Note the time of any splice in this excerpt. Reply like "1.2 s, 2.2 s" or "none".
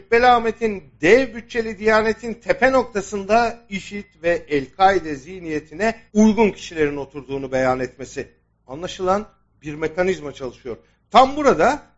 6.1 s